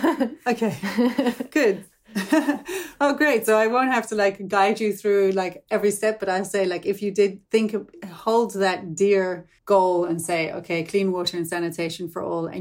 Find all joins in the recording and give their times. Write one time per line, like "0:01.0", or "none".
0:07.5
0:09.6